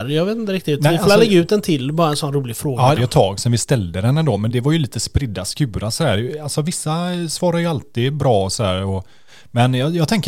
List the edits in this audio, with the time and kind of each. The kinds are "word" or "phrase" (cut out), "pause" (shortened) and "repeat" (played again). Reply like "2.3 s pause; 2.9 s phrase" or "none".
3.0 s phrase; 4.5 s word